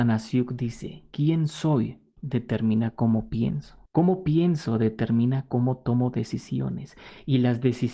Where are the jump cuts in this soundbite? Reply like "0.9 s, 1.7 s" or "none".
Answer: 3.9 s